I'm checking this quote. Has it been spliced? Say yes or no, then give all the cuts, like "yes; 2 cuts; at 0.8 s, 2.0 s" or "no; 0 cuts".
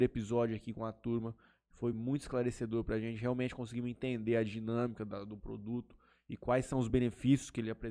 no; 0 cuts